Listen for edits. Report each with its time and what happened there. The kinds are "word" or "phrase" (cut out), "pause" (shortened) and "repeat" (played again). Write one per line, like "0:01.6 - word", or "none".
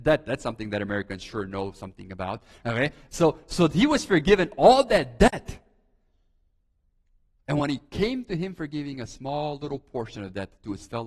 none